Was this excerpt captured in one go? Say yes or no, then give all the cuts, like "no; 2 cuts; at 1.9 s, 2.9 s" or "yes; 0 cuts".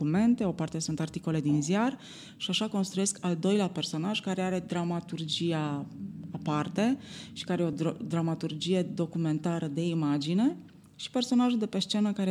yes; 0 cuts